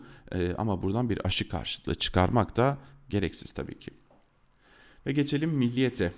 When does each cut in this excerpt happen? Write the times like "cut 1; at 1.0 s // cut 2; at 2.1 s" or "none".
none